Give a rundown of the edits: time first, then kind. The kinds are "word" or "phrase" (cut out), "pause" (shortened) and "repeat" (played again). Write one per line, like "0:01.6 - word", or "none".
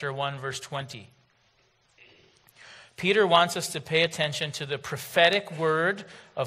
none

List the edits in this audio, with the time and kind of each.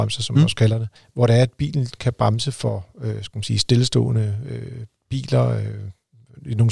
0:01.0 - pause

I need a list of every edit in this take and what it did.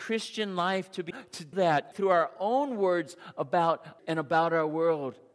0:01.1 - word
0:01.5 - word
0:01.9 - word
0:04.0 - word

